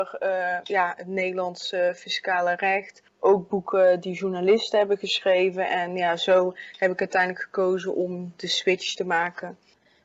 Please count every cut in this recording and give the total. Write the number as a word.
one